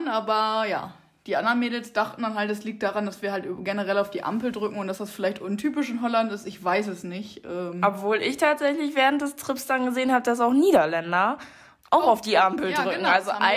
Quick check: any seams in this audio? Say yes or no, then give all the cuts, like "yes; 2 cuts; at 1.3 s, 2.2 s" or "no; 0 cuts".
no; 0 cuts